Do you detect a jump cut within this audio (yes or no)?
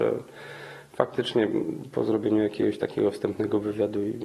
no